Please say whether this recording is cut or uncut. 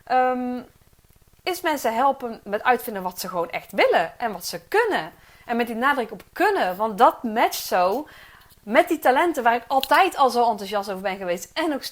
uncut